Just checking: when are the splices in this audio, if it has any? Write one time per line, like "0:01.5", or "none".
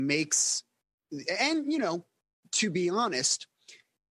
none

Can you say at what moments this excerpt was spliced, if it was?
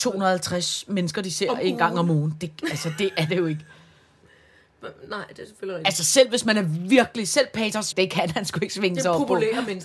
0:07.9

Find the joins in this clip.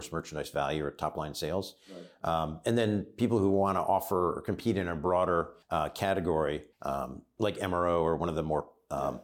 0:05.6
0:06.7

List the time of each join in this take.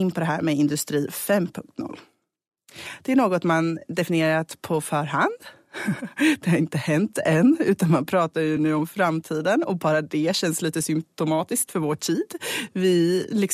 none

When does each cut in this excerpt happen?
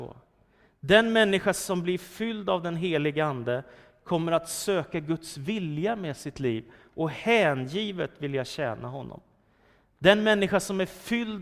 none

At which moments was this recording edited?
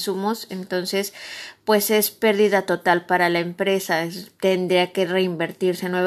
none

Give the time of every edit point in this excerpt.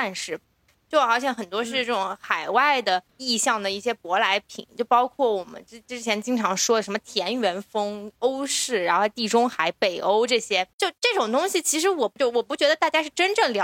0:03.1
0:10.7

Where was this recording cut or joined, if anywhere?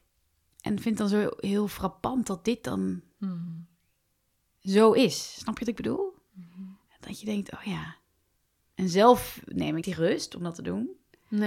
0:09.8

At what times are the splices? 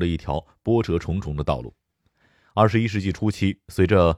none

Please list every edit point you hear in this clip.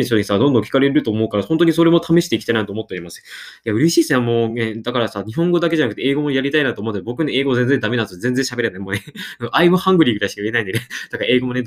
none

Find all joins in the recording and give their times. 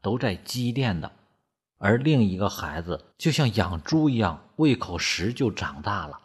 0:03.1

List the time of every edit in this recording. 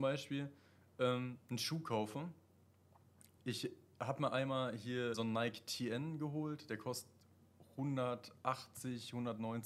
0:03.4
0:05.1

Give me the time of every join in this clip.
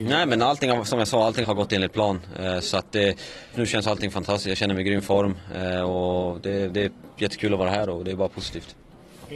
0:01.4
0:03.5

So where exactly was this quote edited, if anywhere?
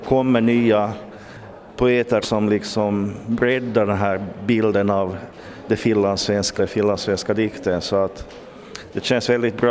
0:02.2
0:06.6

